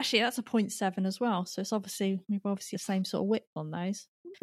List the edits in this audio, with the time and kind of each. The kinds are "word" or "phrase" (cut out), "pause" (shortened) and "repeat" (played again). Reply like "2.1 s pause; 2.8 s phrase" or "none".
2.7 s word